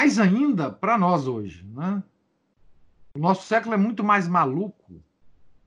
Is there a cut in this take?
no; 0 cuts

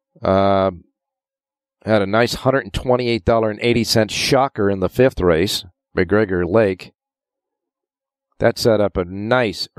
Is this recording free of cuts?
yes; 0 cuts

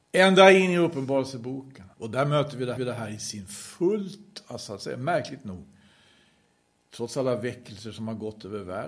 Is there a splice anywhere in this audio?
yes; 2 cuts; at 1.9 s, 2.8 s

